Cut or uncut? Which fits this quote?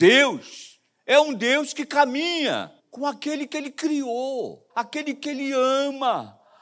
cut